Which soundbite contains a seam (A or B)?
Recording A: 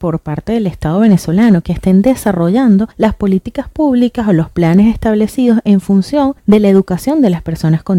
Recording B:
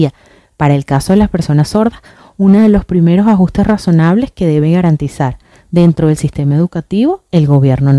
A